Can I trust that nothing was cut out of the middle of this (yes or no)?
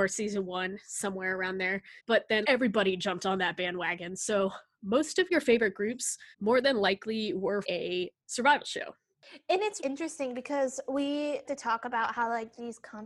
no